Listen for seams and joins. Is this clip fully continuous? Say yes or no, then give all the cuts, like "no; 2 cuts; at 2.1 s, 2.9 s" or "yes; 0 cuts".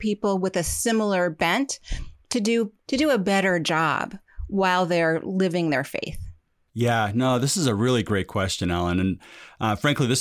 yes; 0 cuts